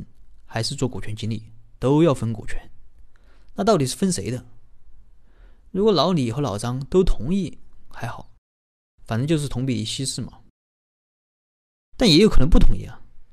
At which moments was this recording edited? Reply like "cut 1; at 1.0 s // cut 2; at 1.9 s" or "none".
none